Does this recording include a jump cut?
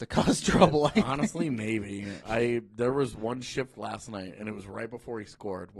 no; 0 cuts

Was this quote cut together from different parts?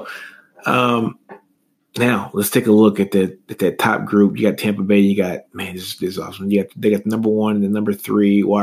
no; 0 cuts

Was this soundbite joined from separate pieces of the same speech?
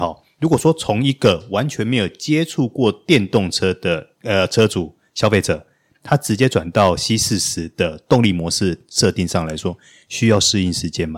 yes; 1 cut; at 4.1 s

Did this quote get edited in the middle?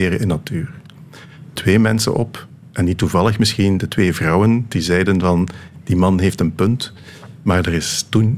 yes; 1 cut; at 1.6 s

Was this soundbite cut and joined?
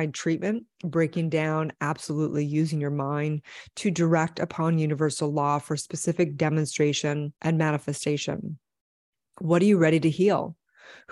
yes; 1 cut; at 7.4 s

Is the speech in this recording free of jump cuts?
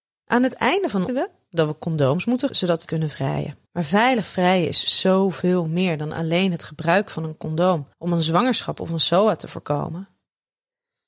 no; 5 cuts; at 1.1 s, 2.5 s, 2.8 s, 3.7 s, 7.9 s

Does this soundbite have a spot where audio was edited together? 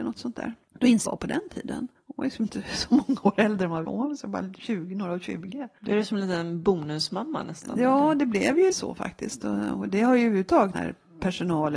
yes; 4 cuts; at 1.0 s, 3.8 s, 8.7 s, 10.7 s

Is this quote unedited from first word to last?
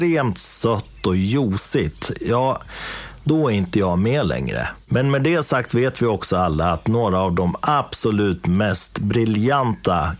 yes; 0 cuts

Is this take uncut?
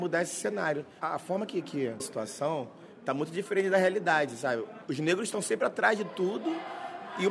no; 1 cut; at 2.0 s

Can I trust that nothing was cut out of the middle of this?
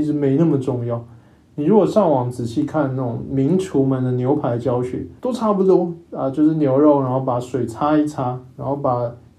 yes; 0 cuts

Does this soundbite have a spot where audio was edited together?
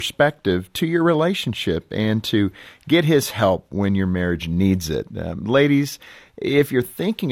no; 0 cuts

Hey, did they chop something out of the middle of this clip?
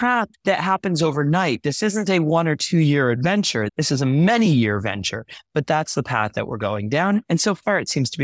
no; 0 cuts

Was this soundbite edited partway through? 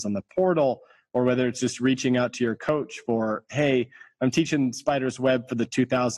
no; 0 cuts

